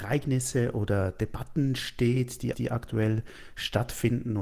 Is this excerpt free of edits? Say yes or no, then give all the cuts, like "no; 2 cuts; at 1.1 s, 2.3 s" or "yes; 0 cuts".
no; 1 cut; at 2.5 s